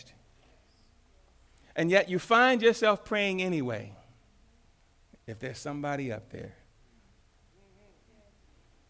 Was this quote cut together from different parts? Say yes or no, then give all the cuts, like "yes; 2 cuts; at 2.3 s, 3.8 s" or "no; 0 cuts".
no; 0 cuts